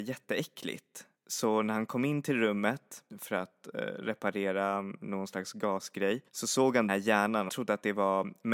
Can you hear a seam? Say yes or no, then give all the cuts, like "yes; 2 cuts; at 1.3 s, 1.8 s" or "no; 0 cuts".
yes; 4 cuts; at 3.1 s, 6.3 s, 6.9 s, 7.5 s